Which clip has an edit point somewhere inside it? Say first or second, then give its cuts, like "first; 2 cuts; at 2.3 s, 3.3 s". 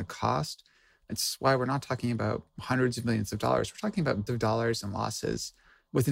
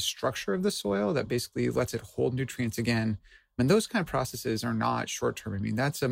first; 2 cuts; at 2.6 s, 4.3 s